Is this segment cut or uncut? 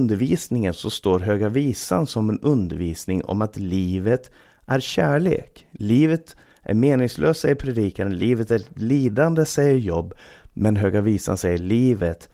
uncut